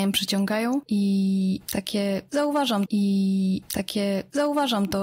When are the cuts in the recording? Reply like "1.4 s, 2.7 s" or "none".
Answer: 2.9 s